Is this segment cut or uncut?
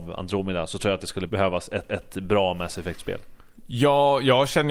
cut